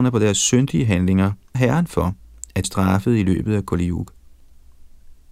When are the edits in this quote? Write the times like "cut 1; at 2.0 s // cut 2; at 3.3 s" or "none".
cut 1; at 1.5 s // cut 2; at 2.6 s